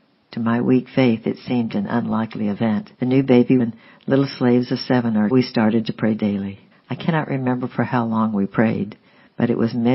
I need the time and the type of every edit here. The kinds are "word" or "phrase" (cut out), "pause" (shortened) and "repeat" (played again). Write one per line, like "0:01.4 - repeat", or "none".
0:02.9 - pause
0:03.6 - phrase
0:05.3 - phrase
0:06.7 - pause